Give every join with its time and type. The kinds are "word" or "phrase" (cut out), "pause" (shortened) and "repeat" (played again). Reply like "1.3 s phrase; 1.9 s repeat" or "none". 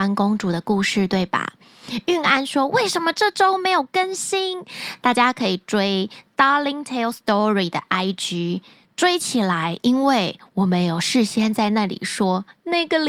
none